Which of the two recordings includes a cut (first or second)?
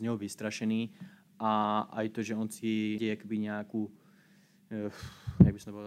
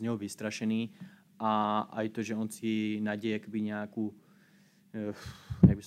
first